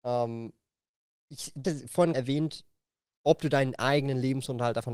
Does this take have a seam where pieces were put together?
yes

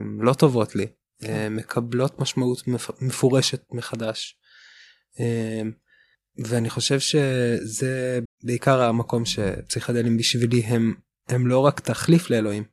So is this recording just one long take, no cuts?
no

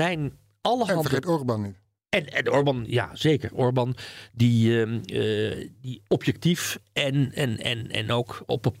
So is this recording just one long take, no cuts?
yes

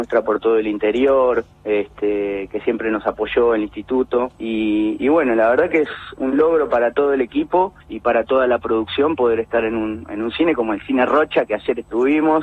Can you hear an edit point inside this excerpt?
yes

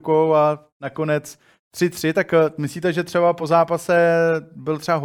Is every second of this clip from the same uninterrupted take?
yes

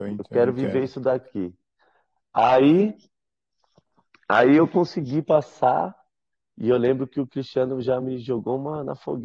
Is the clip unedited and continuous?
yes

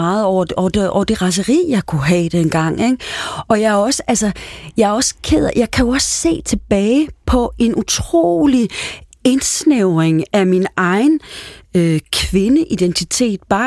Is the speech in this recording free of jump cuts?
yes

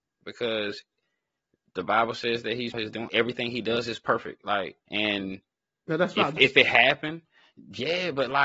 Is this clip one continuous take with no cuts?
no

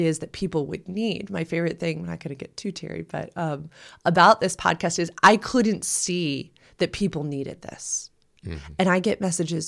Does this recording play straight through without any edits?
yes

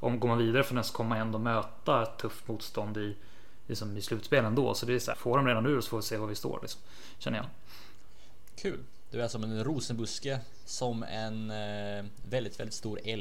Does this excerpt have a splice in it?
yes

